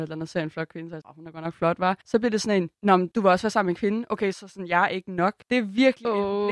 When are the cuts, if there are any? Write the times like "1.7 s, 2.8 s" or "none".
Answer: 1.0 s, 2.0 s, 2.7 s, 4.3 s, 5.4 s